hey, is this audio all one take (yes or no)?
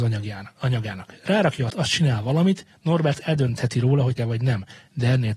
no